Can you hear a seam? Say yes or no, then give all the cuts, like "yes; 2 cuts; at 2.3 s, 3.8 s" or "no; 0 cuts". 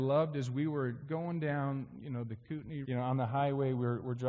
yes; 1 cut; at 2.8 s